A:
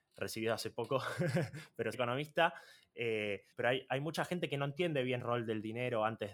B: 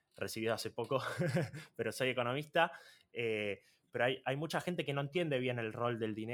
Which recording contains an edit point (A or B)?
A